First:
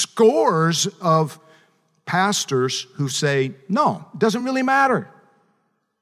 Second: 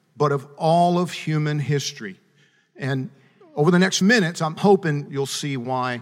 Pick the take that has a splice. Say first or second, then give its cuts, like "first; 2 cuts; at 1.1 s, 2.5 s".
second; 1 cut; at 4.0 s